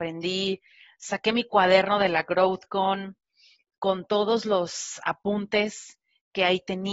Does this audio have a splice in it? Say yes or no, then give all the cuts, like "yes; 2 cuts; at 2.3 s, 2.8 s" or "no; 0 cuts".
no; 0 cuts